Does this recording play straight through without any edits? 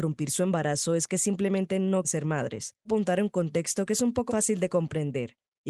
no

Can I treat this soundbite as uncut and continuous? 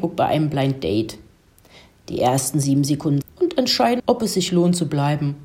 no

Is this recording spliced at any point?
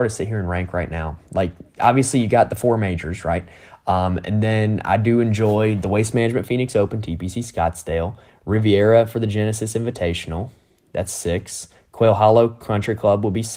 no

